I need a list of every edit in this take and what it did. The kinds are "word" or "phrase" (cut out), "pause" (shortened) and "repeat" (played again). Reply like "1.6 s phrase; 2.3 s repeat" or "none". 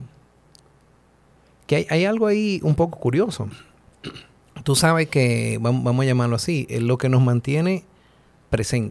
none